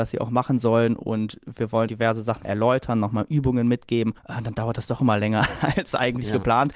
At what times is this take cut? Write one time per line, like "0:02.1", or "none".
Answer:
0:01.9
0:02.4
0:04.2